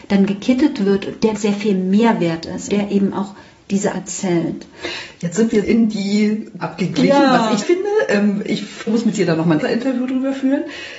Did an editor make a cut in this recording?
yes; 8 cuts; at 1.4 s, 2.7 s, 3.9 s, 5.6 s, 6.6 s, 7.6 s, 8.9 s, 9.6 s

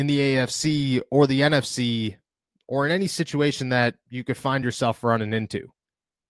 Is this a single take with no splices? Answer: yes; 0 cuts

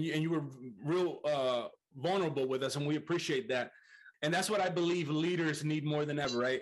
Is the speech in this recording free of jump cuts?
yes; 0 cuts

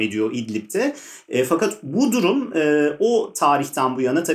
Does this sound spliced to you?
no; 0 cuts

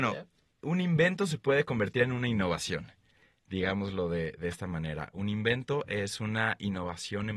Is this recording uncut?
yes; 0 cuts

